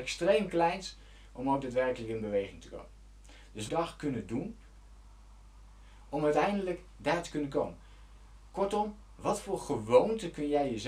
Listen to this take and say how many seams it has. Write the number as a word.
one